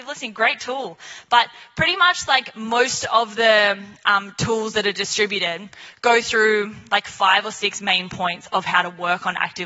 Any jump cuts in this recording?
no; 0 cuts

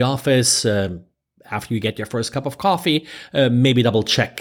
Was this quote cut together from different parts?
no; 0 cuts

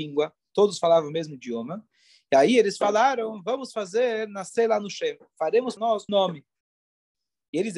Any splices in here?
yes; 2 cuts; at 5.8 s, 6.1 s

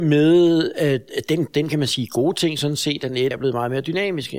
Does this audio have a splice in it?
yes; 1 cut; at 3.3 s

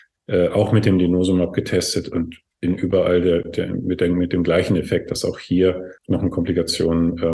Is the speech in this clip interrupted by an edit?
yes; 1 cut; at 6.0 s

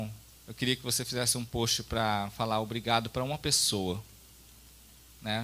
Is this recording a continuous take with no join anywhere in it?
yes; 0 cuts

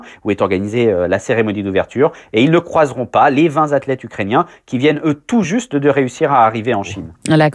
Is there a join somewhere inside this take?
no; 0 cuts

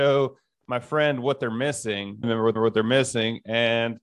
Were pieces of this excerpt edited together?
yes; 2 cuts; at 2.2 s, 2.6 s

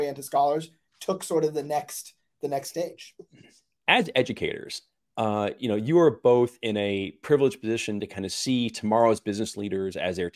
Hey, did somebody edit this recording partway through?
no; 0 cuts

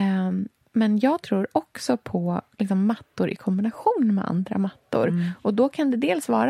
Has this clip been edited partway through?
no; 0 cuts

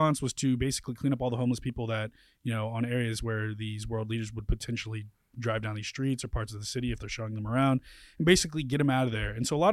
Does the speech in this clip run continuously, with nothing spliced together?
yes; 0 cuts

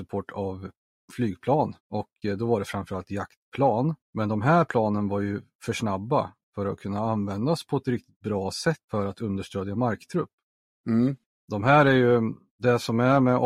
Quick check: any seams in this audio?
yes; 4 cuts; at 1.8 s, 4.0 s, 8.8 s, 11.3 s

